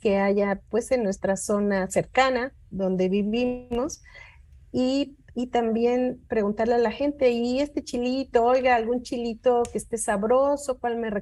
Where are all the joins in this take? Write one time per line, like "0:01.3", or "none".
none